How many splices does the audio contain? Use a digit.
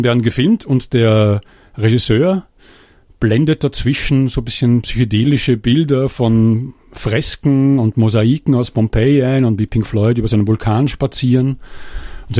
0